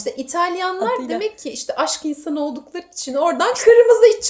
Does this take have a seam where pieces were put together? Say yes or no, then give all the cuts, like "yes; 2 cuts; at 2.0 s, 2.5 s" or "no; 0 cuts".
no; 0 cuts